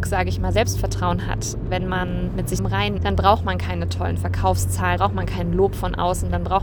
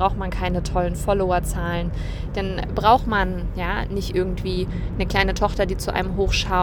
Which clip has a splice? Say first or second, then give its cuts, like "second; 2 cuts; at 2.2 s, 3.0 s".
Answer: first; 3 cuts; at 2.6 s, 3.0 s, 5.0 s